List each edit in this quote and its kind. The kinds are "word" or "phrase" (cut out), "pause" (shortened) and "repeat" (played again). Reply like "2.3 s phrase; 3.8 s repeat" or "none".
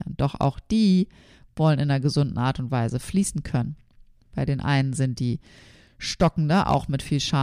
none